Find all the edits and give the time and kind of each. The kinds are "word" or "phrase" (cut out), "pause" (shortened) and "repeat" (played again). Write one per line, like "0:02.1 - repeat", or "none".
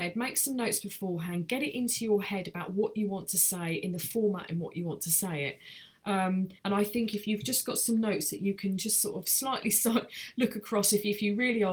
0:06.6 - pause